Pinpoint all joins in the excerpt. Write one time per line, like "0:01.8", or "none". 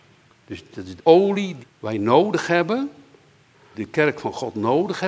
0:01.0
0:01.6
0:03.7